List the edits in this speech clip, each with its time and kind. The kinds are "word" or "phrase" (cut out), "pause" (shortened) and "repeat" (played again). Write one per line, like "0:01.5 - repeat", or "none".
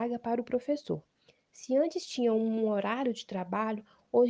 none